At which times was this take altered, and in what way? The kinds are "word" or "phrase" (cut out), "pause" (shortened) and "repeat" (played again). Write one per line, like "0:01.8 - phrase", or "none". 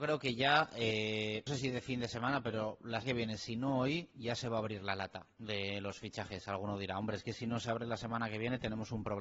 0:01.5 - word
0:03.0 - word
0:05.3 - pause